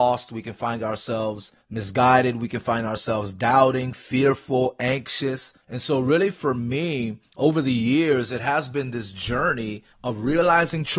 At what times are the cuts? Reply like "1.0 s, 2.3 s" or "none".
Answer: 1.6 s, 5.6 s, 7.3 s, 9.9 s